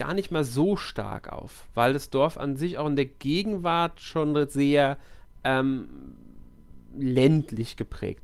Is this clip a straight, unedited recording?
yes; 0 cuts

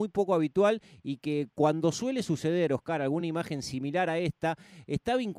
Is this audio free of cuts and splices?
yes; 0 cuts

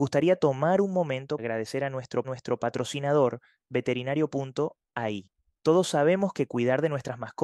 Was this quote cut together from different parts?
yes; 3 cuts; at 1.4 s, 2.2 s, 5.5 s

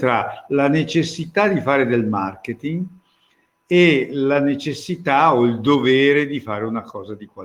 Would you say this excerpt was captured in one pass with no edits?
yes; 0 cuts

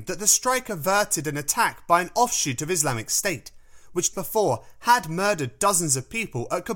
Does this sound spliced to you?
yes; 1 cut; at 4.1 s

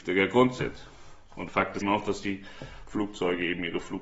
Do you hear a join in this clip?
yes; 1 cut; at 1.8 s

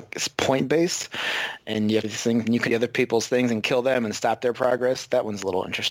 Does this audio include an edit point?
yes; 2 cuts; at 2.0 s, 2.7 s

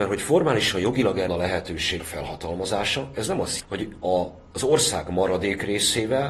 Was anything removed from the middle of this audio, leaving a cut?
yes; 3 cuts; at 1.3 s, 2.0 s, 3.6 s

